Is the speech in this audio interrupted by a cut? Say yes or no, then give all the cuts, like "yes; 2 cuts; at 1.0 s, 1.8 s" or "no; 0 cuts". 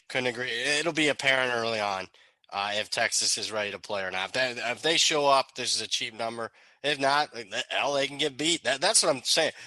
no; 0 cuts